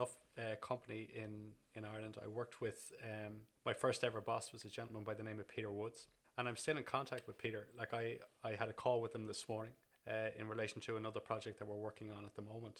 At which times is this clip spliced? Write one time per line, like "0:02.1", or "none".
0:03.6
0:06.2
0:09.9